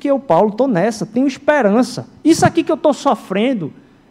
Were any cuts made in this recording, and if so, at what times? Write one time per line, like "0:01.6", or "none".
none